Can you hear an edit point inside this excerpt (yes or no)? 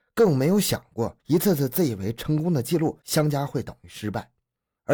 yes